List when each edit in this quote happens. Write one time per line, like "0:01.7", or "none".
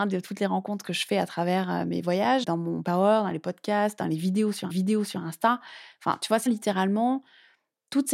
0:02.4
0:02.8
0:04.7
0:06.5